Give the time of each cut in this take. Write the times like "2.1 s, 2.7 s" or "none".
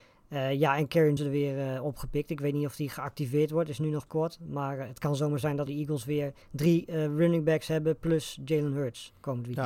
1.2 s, 4.1 s, 5.7 s, 6.4 s